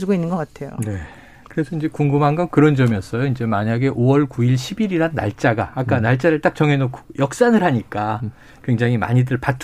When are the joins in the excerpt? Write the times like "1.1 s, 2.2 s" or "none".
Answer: none